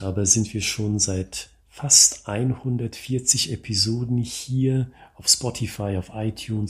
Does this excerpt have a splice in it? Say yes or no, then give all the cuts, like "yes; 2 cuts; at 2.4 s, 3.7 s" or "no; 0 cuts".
no; 0 cuts